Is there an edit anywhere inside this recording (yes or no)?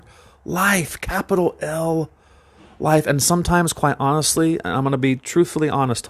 no